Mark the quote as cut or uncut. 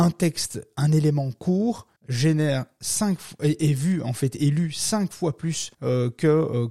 cut